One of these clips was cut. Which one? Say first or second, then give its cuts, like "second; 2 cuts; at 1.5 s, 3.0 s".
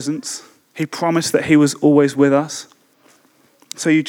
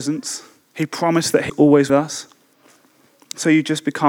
second; 2 cuts; at 1.5 s, 1.9 s